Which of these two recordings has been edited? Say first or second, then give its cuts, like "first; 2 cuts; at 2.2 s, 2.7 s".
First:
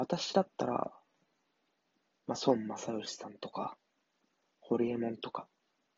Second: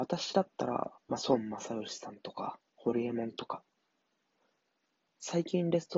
second; 2 cuts; at 1.0 s, 2.7 s